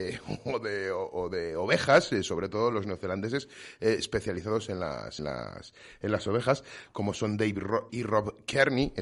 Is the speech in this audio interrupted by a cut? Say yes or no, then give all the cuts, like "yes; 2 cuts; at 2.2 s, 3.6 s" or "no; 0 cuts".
yes; 2 cuts; at 5.2 s, 7.9 s